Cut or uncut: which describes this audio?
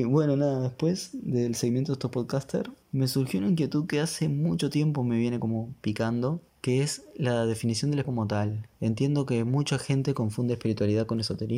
cut